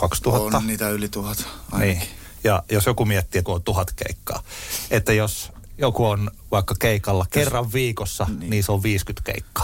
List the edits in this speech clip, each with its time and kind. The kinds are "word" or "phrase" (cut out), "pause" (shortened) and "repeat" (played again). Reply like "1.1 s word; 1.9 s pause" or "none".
3.5 s word